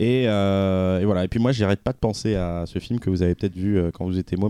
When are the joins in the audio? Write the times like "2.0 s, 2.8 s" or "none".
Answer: none